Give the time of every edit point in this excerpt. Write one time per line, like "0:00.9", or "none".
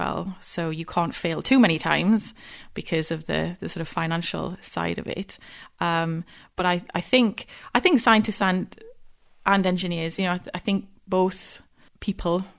none